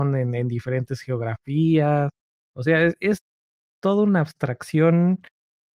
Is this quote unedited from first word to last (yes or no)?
yes